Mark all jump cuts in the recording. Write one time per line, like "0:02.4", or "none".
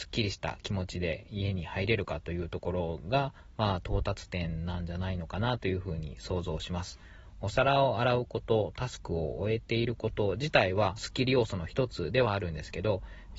0:11.0